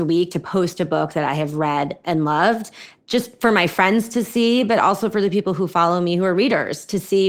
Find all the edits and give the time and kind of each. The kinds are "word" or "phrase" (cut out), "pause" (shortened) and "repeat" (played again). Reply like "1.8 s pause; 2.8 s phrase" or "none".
none